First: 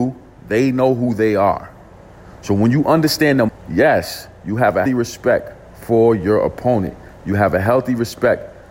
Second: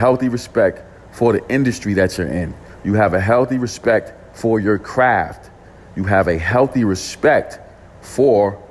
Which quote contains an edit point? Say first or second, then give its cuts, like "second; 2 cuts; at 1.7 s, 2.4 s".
first; 2 cuts; at 3.5 s, 4.9 s